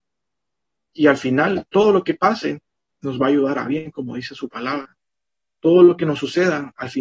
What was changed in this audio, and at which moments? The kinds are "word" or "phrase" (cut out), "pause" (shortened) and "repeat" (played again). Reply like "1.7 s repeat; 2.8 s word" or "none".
none

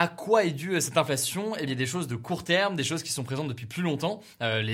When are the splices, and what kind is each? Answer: 1.7 s phrase

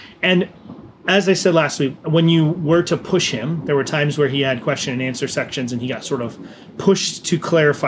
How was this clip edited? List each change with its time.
none

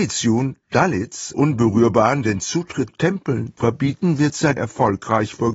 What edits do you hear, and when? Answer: 1.3 s word; 2.9 s word; 3.6 s word; 4.6 s word

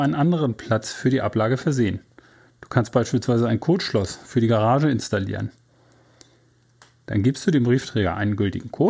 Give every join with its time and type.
none

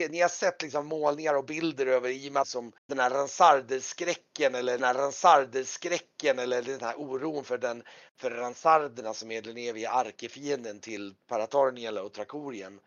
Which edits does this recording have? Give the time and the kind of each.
2.4 s phrase; 2.8 s pause; 4.8 s repeat

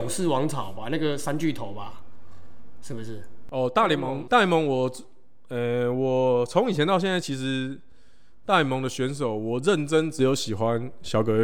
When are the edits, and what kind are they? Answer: 4.3 s word

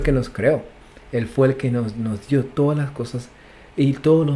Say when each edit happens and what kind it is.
none

